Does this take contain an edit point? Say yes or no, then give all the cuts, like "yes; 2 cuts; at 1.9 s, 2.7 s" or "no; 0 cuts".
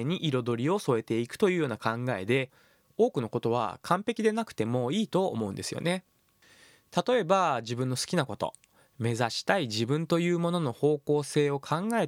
no; 0 cuts